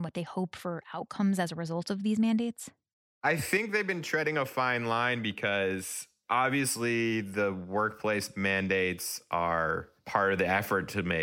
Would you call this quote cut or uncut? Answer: uncut